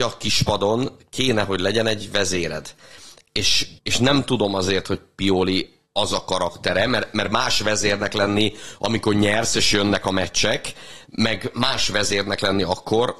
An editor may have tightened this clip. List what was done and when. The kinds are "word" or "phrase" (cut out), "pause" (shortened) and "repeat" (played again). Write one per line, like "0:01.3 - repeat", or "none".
0:03.8 - pause
0:05.9 - pause